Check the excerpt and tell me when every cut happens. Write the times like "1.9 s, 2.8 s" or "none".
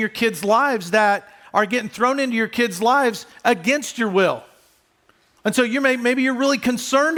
none